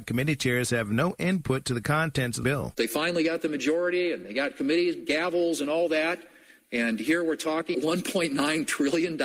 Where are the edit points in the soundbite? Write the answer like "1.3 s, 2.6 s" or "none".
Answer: 2.4 s, 7.7 s